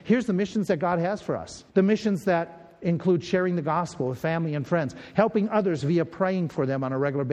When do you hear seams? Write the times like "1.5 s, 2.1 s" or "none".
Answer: 1.7 s